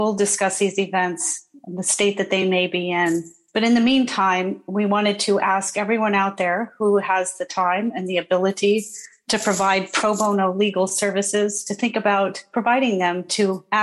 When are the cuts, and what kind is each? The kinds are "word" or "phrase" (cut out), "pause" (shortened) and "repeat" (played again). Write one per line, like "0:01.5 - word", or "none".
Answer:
none